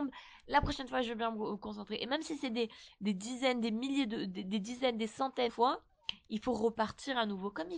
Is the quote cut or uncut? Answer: cut